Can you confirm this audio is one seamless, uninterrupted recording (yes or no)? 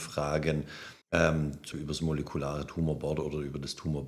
no